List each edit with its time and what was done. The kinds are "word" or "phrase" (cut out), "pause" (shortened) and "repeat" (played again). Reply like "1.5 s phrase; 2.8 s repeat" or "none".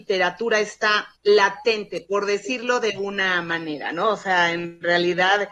1.2 s pause